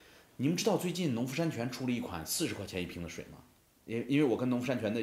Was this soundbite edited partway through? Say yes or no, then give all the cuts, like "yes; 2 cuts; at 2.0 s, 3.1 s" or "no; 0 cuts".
yes; 1 cut; at 3.6 s